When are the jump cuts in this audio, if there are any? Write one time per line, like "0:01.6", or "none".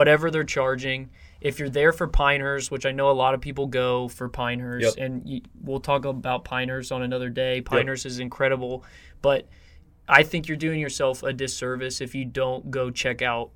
none